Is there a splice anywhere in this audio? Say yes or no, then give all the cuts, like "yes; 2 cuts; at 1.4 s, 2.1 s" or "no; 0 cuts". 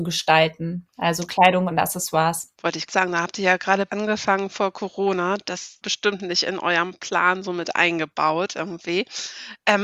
yes; 5 cuts; at 0.9 s, 2.5 s, 2.9 s, 3.9 s, 5.8 s